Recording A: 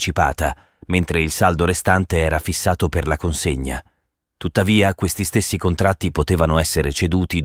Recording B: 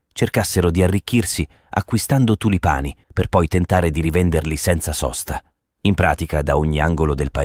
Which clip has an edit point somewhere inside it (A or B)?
B